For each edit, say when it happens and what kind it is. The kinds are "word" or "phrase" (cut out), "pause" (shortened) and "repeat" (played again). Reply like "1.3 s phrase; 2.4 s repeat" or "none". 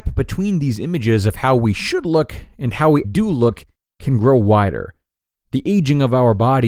3.0 s word